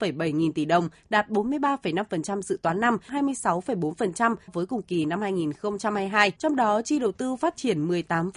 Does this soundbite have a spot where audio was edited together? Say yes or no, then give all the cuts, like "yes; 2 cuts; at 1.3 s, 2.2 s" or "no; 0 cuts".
yes; 3 cuts; at 3.1 s, 4.5 s, 6.4 s